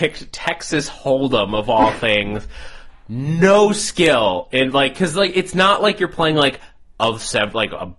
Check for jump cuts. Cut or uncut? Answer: uncut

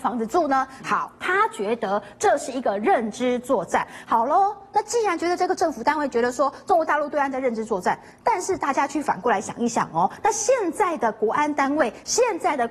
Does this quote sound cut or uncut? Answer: uncut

